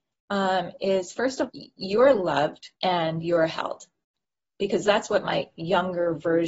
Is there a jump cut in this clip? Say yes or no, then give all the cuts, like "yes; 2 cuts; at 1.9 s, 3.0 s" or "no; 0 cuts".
yes; 3 cuts; at 1.5 s, 2.8 s, 4.2 s